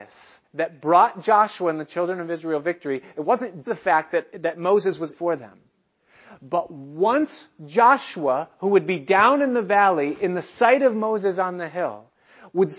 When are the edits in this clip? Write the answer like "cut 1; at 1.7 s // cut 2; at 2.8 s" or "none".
cut 1; at 3.6 s // cut 2; at 4.3 s // cut 3; at 5.1 s